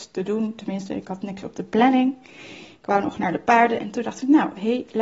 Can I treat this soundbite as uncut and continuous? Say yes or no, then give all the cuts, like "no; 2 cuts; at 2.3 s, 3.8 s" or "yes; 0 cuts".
yes; 0 cuts